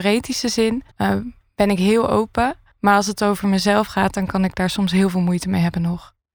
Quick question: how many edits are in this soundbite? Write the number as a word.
two